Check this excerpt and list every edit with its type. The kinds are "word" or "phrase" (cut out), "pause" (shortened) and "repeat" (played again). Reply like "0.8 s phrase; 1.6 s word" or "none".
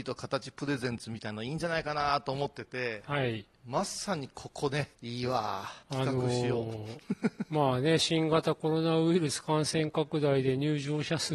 4.9 s pause; 5.8 s pause

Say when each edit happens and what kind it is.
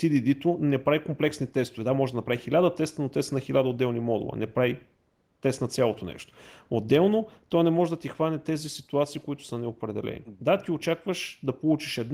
none

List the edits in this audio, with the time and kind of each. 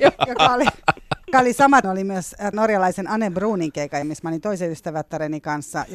1.3 s word; 1.8 s word; 2.5 s phrase; 4.0 s word

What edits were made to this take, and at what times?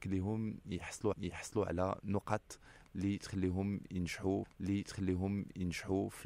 1.1 s repeat; 4.4 s repeat

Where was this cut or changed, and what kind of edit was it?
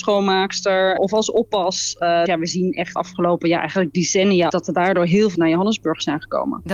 1.0 s word; 2.3 s word; 3.0 s word; 4.5 s word; 5.3 s word

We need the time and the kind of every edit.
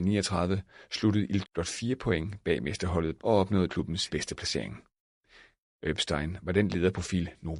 1.4 s word; 3.2 s word; 3.7 s word; 4.1 s word

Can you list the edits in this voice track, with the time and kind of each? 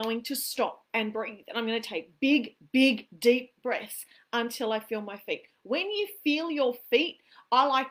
none

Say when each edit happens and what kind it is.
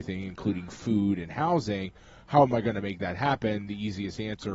none

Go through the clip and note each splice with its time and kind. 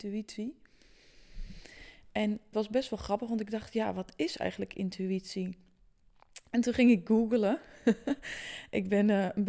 2.5 s word

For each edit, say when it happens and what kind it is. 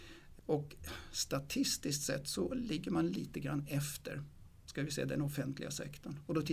none

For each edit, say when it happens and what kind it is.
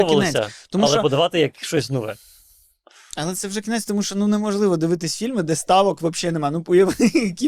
none

